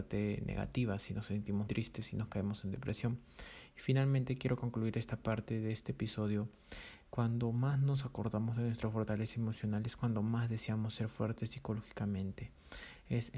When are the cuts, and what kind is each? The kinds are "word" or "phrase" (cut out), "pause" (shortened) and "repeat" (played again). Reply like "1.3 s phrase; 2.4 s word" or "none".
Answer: 1.7 s word

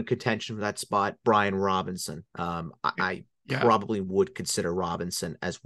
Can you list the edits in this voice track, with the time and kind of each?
2.3 s pause

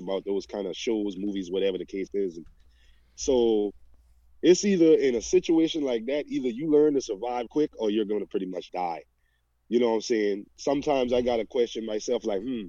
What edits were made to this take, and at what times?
7.5 s word; 8.7 s word

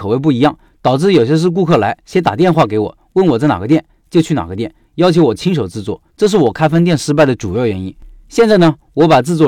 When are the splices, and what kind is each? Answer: 6.1 s pause

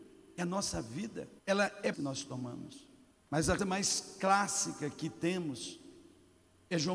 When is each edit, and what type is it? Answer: 1.4 s pause; 1.9 s phrase; 3.1 s pause; 3.6 s word

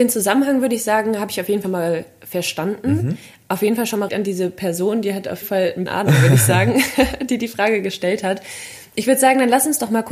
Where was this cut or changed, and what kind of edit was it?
1.6 s word; 4.1 s word; 5.4 s word; 5.9 s word

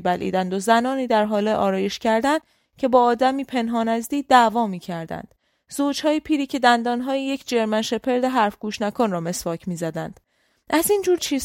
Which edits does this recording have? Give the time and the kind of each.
none

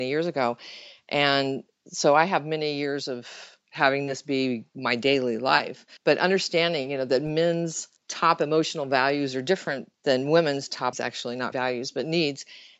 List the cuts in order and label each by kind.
6.0 s pause; 8.0 s pause; 9.9 s pause; 10.9 s phrase; 11.5 s word

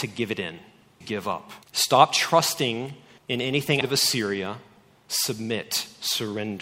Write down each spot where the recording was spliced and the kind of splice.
1.0 s word; 1.6 s pause; 3.2 s pause; 3.8 s word

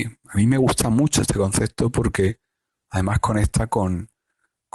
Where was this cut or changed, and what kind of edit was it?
none

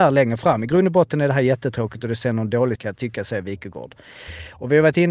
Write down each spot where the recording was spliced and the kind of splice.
2.7 s word

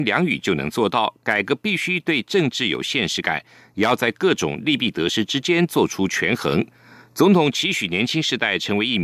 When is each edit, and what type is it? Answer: none

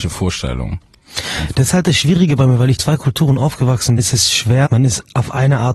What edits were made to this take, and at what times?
2.8 s word; 4.0 s word; 4.7 s word

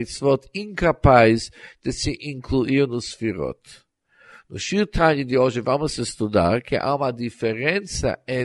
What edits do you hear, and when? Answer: none

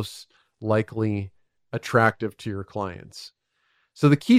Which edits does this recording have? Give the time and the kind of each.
none

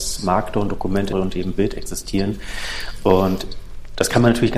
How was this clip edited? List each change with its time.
1.1 s phrase

